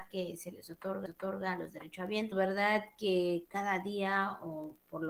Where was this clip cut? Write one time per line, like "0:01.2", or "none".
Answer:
0:01.1
0:02.3